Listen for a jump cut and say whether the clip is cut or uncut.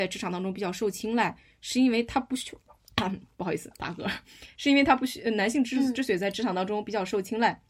uncut